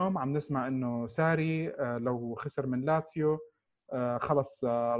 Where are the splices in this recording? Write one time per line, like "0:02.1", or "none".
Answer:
none